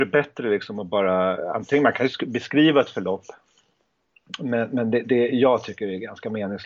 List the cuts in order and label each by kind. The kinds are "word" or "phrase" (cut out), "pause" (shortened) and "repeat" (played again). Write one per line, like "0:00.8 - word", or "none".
none